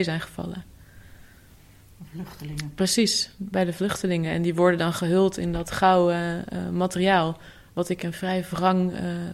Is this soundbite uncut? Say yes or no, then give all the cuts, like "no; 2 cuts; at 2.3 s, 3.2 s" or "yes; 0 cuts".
yes; 0 cuts